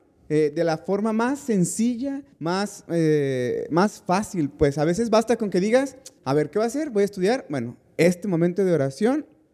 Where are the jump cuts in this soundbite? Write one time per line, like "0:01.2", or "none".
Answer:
0:02.3
0:06.2